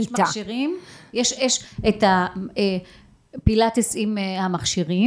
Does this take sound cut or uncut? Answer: uncut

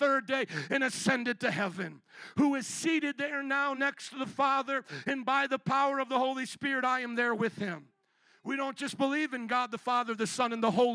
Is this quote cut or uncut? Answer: uncut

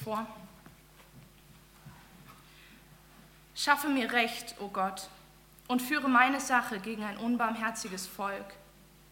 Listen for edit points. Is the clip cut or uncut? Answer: uncut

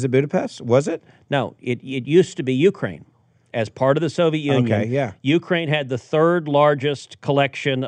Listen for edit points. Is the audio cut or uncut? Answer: uncut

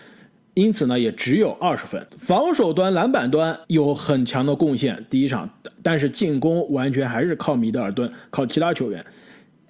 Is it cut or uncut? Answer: cut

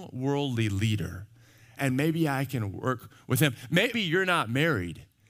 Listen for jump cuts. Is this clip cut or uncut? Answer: cut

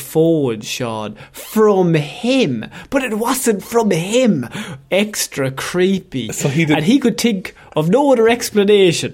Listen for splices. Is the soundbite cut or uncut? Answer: uncut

